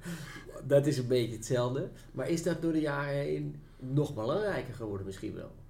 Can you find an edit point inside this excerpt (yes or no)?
no